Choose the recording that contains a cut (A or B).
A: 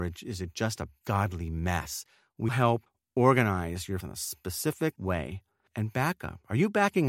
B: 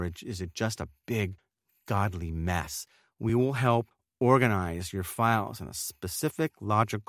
A